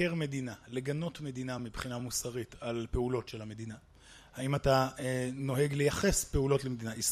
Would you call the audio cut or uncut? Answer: uncut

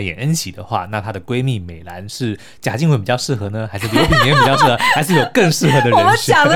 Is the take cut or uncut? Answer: uncut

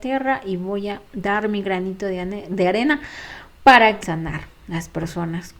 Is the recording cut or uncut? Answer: cut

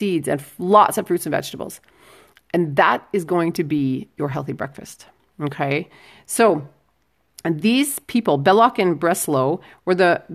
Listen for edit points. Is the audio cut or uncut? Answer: uncut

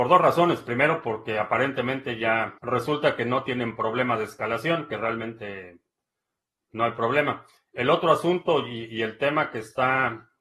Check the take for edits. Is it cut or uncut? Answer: cut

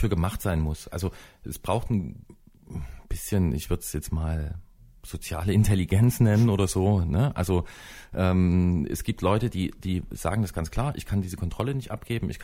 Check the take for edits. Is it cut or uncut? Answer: uncut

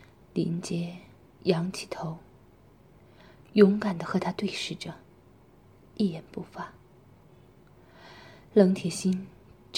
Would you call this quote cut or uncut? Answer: uncut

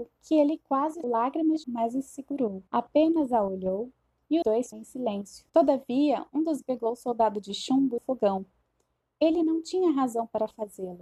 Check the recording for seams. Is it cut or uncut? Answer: cut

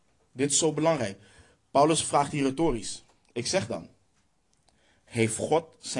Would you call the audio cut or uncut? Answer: uncut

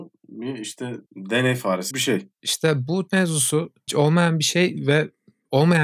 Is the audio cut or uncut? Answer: cut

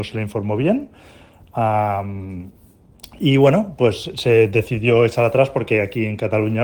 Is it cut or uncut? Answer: uncut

